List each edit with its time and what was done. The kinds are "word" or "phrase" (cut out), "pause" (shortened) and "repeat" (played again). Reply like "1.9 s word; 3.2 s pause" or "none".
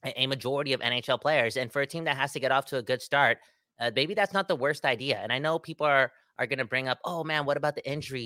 none

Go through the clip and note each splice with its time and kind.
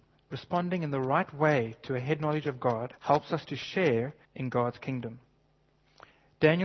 3.0 s pause; 4.2 s pause

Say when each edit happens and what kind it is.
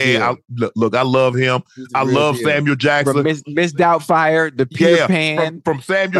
none

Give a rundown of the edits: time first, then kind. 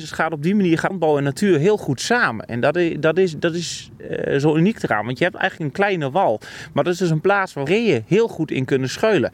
0.9 s word; 7.7 s word

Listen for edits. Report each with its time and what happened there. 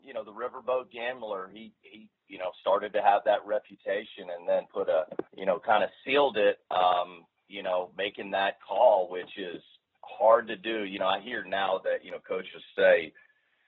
5.3 s pause; 6.6 s pause

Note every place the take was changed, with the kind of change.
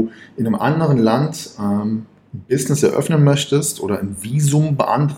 none

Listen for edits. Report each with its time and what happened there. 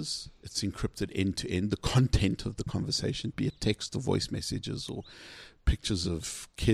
none

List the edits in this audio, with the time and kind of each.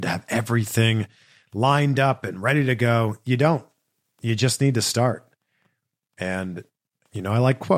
none

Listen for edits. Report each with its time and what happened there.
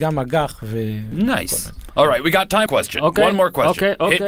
2.7 s phrase

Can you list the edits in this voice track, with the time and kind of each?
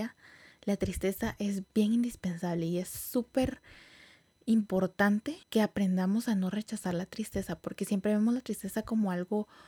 5.4 s pause

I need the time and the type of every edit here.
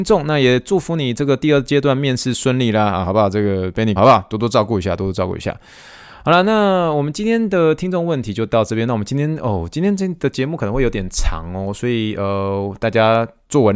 4.0 s phrase

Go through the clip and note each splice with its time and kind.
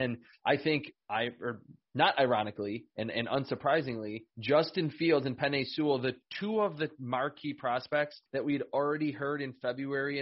1.0 s pause; 4.3 s pause; 8.3 s pause

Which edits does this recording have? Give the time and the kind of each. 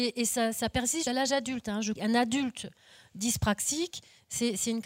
1.1 s word; 2.0 s word

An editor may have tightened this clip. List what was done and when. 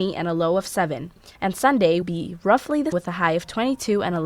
1.4 s pause; 2.0 s word; 2.9 s word

